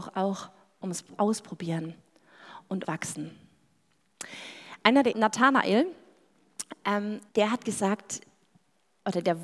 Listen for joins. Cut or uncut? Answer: cut